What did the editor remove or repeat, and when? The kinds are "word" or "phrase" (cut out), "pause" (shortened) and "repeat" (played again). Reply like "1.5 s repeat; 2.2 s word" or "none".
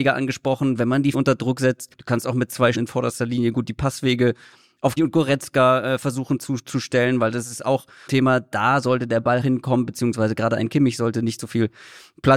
1.1 s word; 1.9 s pause; 2.7 s word; 5.0 s word; 8.1 s phrase; 9.4 s phrase

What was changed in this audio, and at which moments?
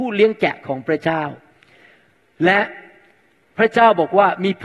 none

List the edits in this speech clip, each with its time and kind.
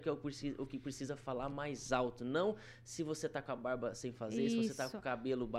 none

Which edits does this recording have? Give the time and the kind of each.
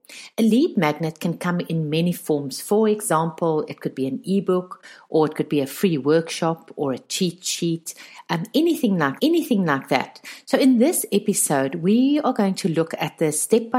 9.2 s repeat

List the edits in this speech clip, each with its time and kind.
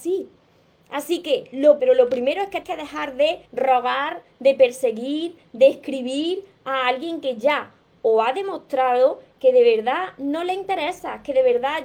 1.8 s phrase; 2.6 s word; 3.5 s pause

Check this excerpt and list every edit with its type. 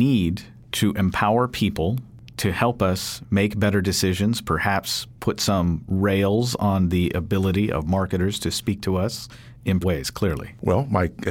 3.3 s pause; 5.2 s pause; 9.8 s word

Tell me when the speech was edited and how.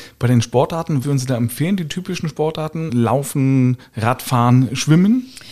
1.0 s word

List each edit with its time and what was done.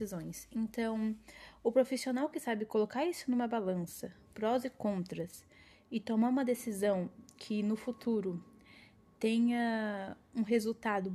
none

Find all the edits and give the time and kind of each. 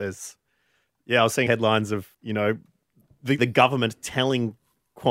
1.5 s word; 2.1 s pause; 3.4 s word

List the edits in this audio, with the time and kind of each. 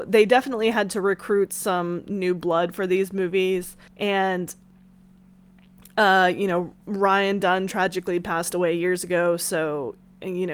3.9 s pause; 6.8 s pause

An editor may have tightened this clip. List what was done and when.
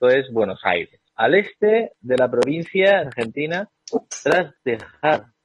3.0 s phrase

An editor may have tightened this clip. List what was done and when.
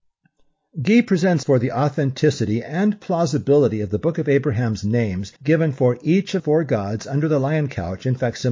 1.4 s word; 5.4 s pause; 6.4 s word

